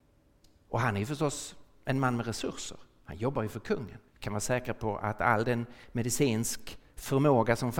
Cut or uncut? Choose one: cut